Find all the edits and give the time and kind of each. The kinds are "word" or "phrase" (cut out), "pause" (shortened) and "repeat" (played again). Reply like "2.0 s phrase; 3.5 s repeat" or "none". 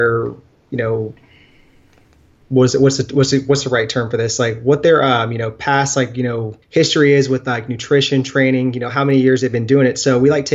6.6 s pause